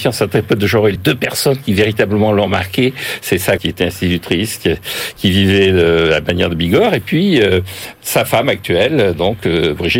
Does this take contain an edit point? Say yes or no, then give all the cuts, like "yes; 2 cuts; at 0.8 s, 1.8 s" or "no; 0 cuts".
yes; 2 cuts; at 1.0 s, 3.6 s